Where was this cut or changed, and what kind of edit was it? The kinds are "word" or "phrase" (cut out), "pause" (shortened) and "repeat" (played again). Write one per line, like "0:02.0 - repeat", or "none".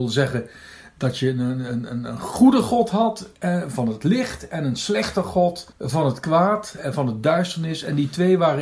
0:05.7 - pause